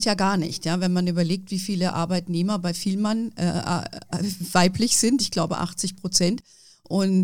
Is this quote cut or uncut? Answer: uncut